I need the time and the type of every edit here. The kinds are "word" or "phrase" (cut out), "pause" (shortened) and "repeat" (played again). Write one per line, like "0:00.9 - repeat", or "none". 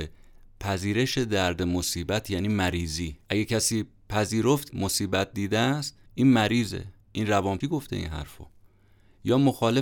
0:03.2 - pause
0:04.7 - word
0:06.1 - pause
0:07.0 - pause
0:07.6 - phrase